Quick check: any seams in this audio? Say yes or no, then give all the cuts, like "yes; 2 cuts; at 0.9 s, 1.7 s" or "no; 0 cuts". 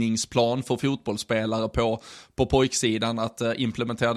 no; 0 cuts